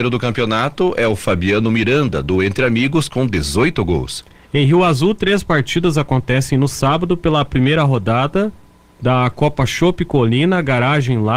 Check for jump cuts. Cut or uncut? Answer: uncut